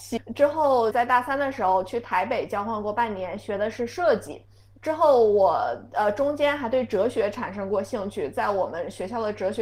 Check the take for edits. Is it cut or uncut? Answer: cut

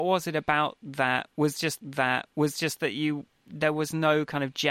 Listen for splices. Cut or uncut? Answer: cut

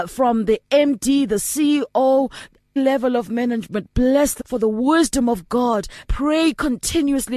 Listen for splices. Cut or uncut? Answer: cut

